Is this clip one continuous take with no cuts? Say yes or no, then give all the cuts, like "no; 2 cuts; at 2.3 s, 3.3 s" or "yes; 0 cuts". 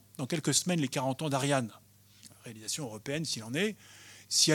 yes; 0 cuts